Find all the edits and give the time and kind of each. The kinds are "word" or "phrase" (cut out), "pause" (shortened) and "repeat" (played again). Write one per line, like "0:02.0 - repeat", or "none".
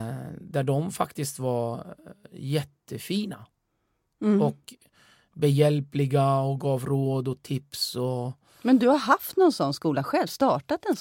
none